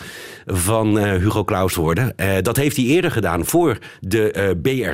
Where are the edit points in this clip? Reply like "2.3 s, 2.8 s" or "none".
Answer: 1.7 s